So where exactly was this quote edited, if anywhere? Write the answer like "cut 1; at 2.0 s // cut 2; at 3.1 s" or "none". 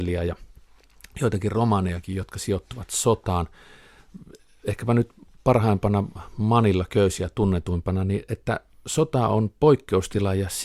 none